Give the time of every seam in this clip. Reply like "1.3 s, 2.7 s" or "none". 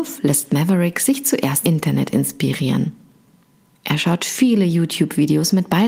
1.6 s